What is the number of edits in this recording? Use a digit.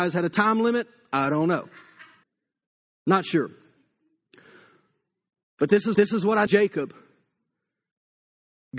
3